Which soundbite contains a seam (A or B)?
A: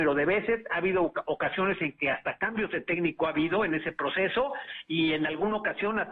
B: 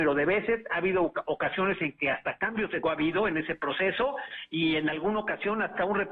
B